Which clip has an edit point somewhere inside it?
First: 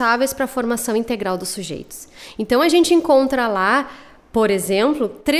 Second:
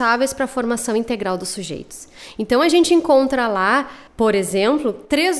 second; 1 cut; at 4.1 s

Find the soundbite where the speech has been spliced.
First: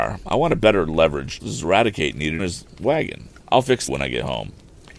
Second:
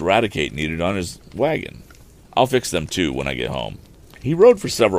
first; 4 cuts; at 1.4 s, 2.4 s, 3.4 s, 3.9 s

